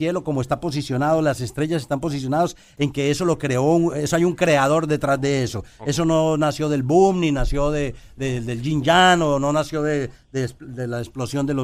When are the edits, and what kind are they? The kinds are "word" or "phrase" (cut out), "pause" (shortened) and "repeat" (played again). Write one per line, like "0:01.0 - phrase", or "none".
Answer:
none

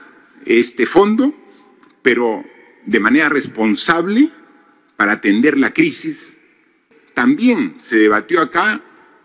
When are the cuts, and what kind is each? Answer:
none

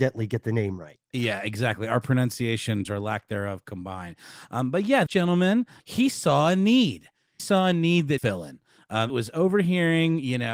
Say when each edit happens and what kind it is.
0:02.9 - word
0:05.1 - word
0:05.8 - word
0:07.4 - word
0:08.2 - word
0:09.1 - word

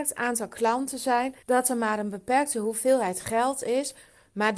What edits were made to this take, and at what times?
0:01.4 - pause

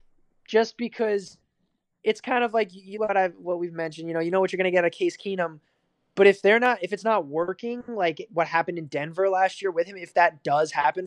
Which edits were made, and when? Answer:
0:02.9 - word

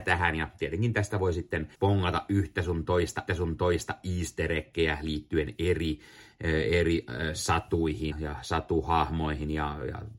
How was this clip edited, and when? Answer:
0:01.7 - pause
0:03.3 - repeat
0:08.1 - word

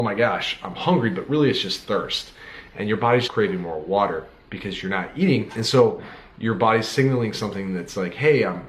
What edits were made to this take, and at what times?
0:03.3 - word

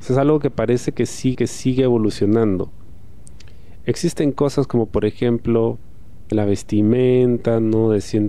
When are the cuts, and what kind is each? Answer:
0:01.3 - repeat
0:06.3 - phrase

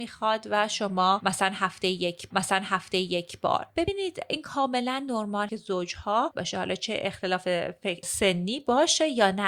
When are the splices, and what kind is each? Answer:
0:02.3 - repeat
0:05.5 - word
0:06.3 - phrase
0:08.0 - word

